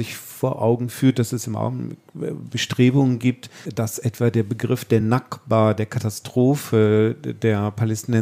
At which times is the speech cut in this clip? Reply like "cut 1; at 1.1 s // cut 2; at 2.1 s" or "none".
none